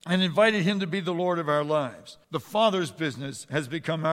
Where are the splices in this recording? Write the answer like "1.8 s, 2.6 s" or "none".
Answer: 2.2 s